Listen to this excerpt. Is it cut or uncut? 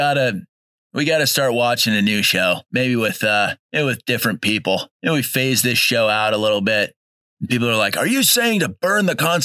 cut